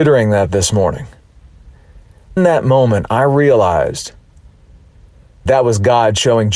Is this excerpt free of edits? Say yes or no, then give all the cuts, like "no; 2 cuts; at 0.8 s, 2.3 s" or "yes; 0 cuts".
no; 2 cuts; at 2.4 s, 5.5 s